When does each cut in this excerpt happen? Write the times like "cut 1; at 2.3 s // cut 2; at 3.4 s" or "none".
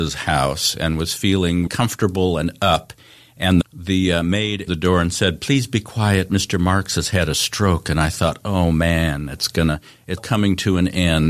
cut 1; at 1.7 s // cut 2; at 3.6 s // cut 3; at 4.7 s // cut 4; at 10.2 s